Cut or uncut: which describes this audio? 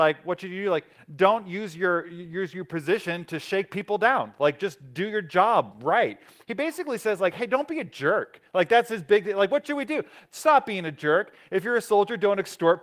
uncut